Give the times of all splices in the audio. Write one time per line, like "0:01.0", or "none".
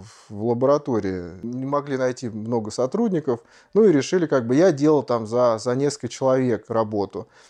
none